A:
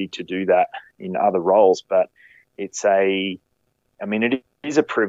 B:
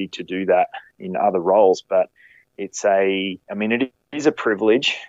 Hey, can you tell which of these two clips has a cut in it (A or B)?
B